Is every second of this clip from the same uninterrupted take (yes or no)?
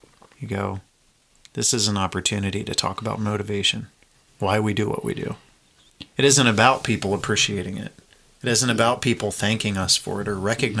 yes